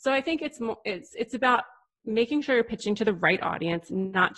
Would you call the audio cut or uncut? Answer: uncut